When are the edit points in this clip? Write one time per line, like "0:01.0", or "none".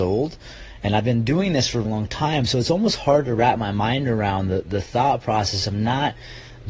0:01.8